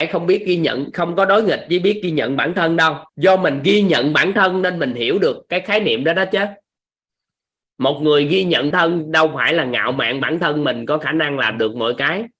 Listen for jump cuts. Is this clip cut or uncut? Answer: cut